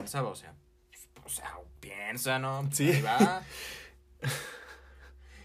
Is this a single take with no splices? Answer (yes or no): no